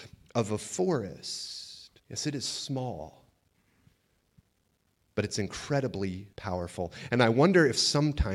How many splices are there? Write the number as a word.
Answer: two